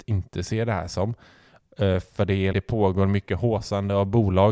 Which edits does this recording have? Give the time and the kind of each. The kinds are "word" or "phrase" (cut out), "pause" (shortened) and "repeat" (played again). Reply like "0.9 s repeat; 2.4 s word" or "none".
2.5 s word